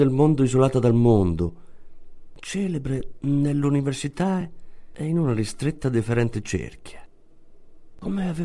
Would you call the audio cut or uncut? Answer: uncut